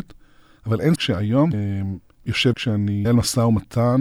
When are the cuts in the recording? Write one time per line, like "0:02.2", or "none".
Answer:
0:01.0
0:01.5
0:02.5
0:03.0